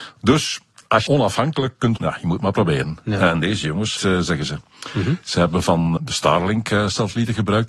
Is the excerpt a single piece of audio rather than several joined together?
no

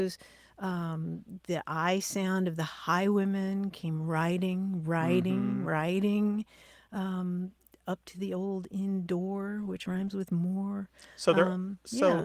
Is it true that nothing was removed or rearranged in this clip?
yes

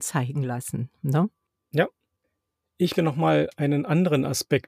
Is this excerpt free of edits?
no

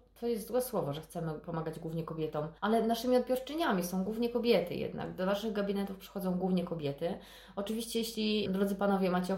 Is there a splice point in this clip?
yes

